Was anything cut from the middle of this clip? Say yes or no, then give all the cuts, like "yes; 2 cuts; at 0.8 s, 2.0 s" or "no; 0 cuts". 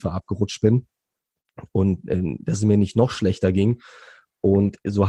no; 0 cuts